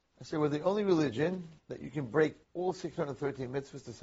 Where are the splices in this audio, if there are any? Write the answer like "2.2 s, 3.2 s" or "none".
1.6 s, 2.4 s